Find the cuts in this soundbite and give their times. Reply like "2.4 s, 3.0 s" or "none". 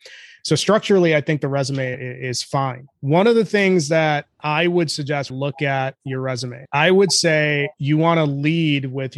5.3 s, 7.7 s